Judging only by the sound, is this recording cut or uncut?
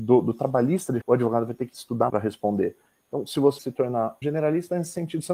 cut